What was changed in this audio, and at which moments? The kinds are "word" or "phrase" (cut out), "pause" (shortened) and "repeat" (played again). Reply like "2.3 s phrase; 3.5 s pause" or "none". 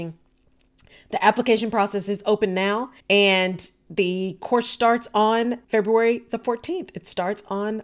3.0 s pause; 5.6 s pause

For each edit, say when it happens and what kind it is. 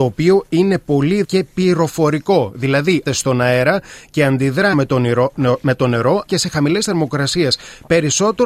1.2 s word; 3.1 s word; 4.7 s word; 6.3 s word

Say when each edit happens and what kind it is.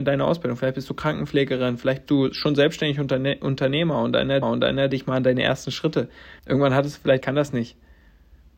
2.1 s word; 4.4 s repeat; 6.4 s pause; 7.2 s phrase

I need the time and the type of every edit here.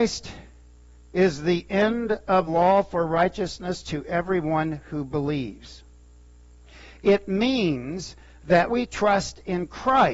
2.5 s word; 8.7 s word

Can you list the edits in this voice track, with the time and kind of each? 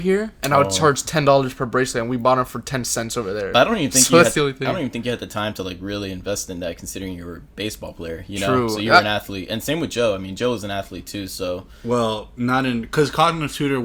none

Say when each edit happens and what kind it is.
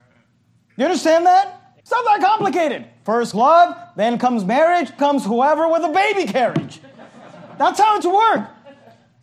1.8 s pause; 3.3 s word; 5.0 s word; 8.0 s word

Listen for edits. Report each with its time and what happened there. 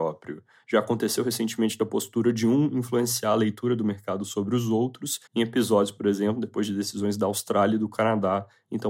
5.3 s pause

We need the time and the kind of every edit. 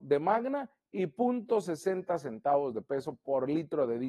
none

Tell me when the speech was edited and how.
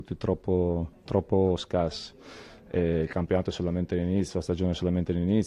none

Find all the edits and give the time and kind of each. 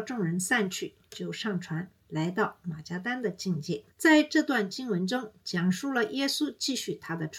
3.9 s pause

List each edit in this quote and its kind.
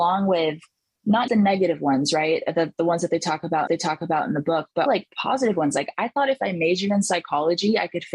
1.3 s word; 3.7 s repeat; 4.9 s word

